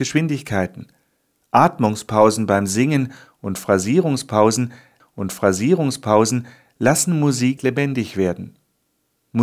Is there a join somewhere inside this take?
yes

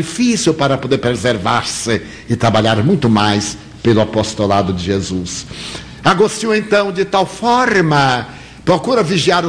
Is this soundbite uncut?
yes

